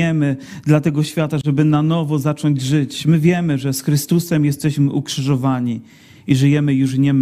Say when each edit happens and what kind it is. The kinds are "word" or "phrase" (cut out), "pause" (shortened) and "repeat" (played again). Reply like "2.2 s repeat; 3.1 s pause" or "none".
none